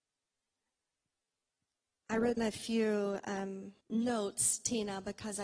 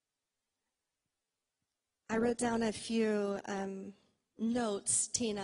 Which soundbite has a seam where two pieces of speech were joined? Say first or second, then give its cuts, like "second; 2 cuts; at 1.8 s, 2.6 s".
first; 2 cuts; at 2.4 s, 3.8 s